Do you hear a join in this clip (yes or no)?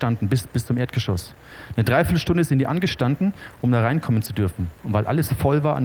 no